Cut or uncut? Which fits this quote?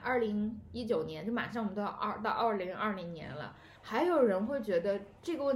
cut